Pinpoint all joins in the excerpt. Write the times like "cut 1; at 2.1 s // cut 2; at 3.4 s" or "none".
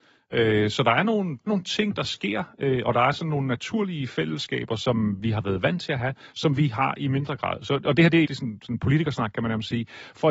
cut 1; at 1.5 s // cut 2; at 8.2 s

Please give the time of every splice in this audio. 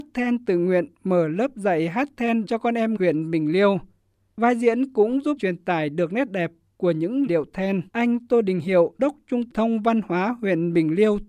cut 1; at 2.5 s // cut 2; at 3.0 s // cut 3; at 5.4 s // cut 4; at 7.3 s // cut 5; at 7.9 s // cut 6; at 9.0 s // cut 7; at 9.5 s

